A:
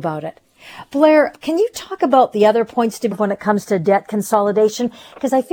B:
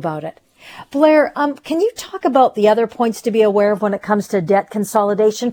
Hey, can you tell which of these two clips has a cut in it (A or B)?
A